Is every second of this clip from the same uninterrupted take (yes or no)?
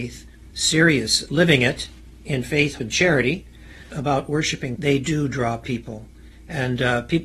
no